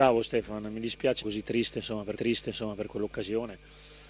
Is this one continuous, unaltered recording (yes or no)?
no